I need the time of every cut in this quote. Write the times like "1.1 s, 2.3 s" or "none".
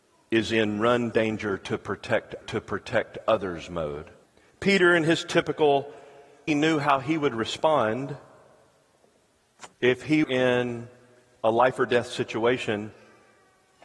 1.1 s, 2.4 s, 4.2 s, 6.5 s, 9.7 s, 10.2 s